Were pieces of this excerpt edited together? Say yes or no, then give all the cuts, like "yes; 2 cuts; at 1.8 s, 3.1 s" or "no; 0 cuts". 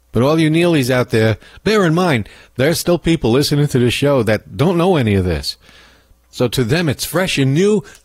no; 0 cuts